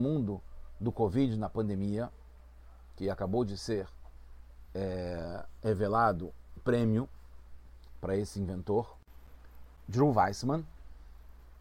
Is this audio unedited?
no; 1 cut; at 6.6 s

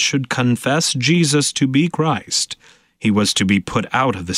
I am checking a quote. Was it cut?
no; 0 cuts

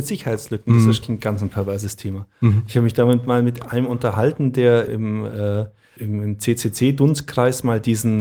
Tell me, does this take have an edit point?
yes; 3 cuts; at 1.0 s, 4.9 s, 6.0 s

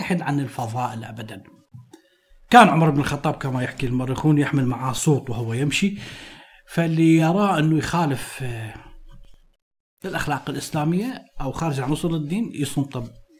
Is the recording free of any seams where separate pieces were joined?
yes; 0 cuts

